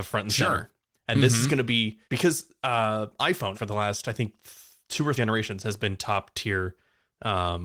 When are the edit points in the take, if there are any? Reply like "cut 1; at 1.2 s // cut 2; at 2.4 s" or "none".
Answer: cut 1; at 2.0 s // cut 2; at 3.5 s // cut 3; at 4.8 s // cut 4; at 5.2 s